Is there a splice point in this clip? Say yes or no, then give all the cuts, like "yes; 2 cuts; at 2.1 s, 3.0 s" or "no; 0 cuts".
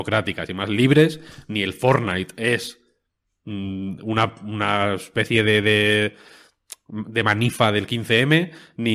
no; 0 cuts